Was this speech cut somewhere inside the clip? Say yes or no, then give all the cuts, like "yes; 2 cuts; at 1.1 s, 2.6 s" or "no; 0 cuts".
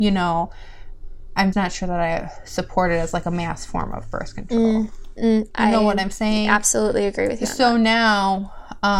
yes; 1 cut; at 1.5 s